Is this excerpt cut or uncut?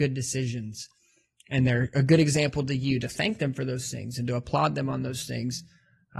uncut